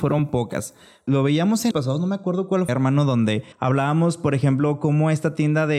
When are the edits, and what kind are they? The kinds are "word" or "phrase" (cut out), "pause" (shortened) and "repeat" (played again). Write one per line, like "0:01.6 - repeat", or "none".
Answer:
0:01.7 - word
0:02.7 - word
0:03.5 - pause